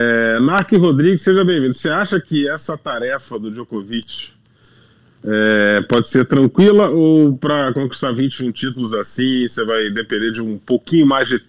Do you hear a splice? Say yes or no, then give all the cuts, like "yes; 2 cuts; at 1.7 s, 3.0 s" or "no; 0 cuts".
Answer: no; 0 cuts